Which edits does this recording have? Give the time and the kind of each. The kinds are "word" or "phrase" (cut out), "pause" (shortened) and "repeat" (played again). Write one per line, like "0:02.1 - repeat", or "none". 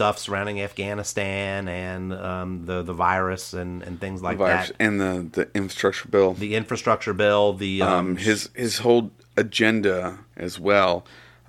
0:10.3 - pause